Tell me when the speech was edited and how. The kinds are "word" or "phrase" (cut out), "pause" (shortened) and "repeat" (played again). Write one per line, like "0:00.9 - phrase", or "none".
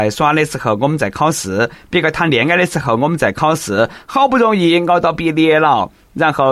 none